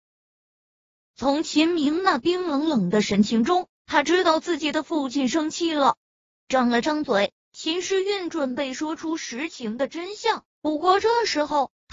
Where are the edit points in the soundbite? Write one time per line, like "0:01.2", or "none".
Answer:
0:06.1